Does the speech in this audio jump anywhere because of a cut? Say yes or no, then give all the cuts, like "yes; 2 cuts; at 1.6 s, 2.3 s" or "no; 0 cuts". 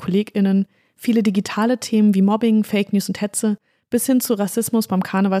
no; 0 cuts